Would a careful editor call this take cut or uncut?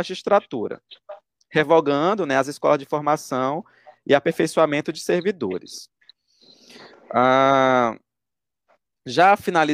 uncut